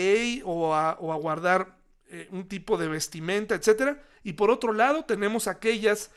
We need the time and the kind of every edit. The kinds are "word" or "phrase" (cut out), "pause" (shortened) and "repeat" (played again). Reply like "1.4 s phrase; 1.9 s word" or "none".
none